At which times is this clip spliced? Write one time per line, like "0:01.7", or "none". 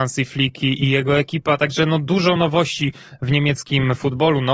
none